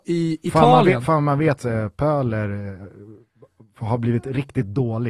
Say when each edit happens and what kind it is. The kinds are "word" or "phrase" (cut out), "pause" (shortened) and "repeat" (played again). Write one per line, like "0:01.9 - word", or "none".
0:01.6 - word